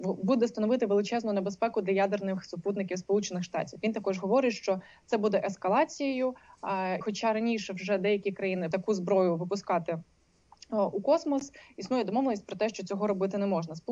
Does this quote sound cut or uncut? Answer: cut